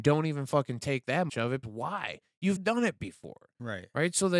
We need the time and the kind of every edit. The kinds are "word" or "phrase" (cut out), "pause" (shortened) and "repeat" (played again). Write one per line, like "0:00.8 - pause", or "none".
0:01.3 - word
0:01.6 - word
0:02.6 - word